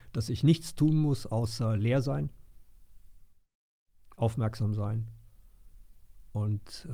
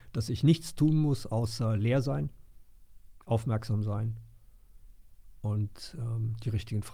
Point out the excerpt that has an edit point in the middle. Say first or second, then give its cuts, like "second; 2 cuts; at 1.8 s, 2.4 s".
second; 1 cut; at 3.2 s